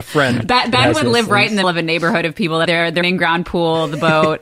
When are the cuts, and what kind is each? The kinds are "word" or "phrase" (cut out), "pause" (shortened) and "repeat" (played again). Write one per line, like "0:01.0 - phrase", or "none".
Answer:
0:01.6 - word
0:02.7 - word
0:03.0 - word